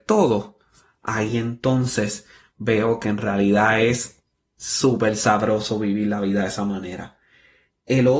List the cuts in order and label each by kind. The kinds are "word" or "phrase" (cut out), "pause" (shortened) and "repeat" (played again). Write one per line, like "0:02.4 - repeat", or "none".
none